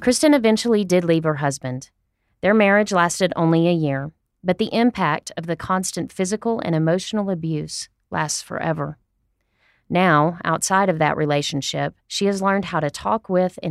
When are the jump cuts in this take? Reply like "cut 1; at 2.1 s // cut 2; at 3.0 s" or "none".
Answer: cut 1; at 12.0 s